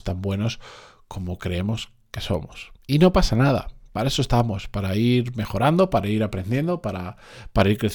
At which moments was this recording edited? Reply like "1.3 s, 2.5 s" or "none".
2.8 s